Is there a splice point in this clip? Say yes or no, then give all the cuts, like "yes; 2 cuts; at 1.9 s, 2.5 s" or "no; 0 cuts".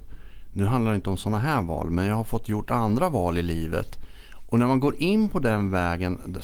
no; 0 cuts